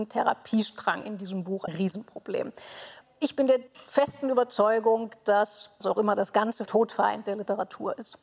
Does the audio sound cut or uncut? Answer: cut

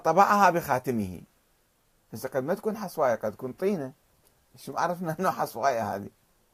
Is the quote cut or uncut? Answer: uncut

